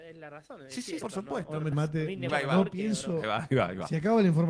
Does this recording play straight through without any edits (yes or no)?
no